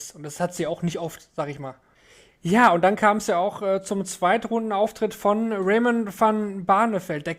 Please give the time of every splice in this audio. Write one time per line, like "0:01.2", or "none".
none